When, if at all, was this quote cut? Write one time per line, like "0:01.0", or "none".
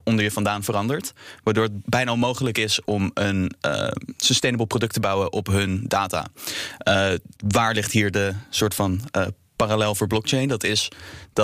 0:07.4